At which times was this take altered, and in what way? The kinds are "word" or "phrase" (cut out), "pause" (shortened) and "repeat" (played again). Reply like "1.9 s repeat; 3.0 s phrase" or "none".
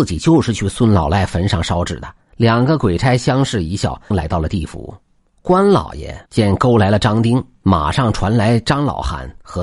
2.3 s pause; 4.1 s phrase; 5.2 s pause; 6.3 s pause

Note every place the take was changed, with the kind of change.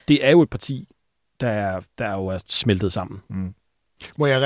none

